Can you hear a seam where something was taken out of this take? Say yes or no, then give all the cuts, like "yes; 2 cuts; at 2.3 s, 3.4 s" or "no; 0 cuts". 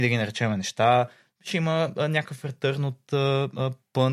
no; 0 cuts